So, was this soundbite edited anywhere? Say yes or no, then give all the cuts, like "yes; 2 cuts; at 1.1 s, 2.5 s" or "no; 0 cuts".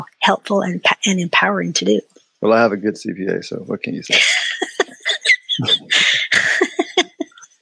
yes; 1 cut; at 2.2 s